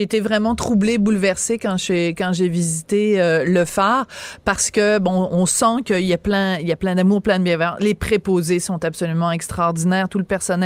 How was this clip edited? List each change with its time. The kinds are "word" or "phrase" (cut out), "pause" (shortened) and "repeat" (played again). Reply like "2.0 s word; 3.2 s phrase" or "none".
none